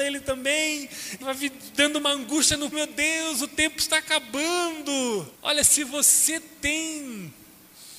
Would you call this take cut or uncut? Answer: cut